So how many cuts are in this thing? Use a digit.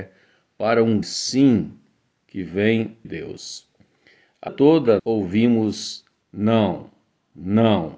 5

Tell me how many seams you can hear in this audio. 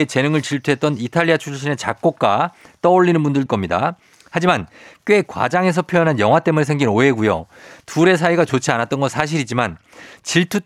1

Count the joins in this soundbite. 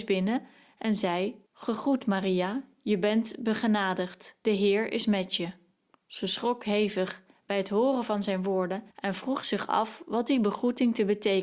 3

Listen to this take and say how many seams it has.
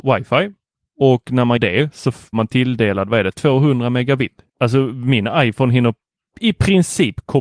3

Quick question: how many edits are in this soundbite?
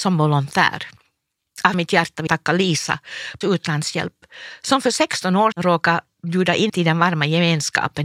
5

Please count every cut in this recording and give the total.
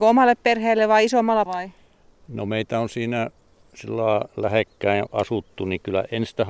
1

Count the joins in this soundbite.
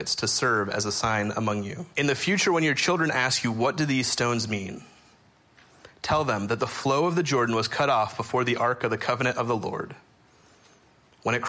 1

